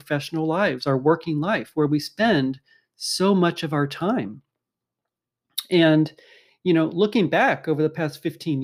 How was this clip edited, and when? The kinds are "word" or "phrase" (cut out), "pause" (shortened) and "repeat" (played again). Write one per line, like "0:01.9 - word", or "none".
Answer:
none